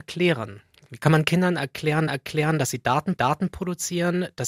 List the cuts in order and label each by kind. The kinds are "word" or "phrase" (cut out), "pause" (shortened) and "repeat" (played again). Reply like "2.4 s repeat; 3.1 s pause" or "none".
2.1 s repeat; 3.2 s repeat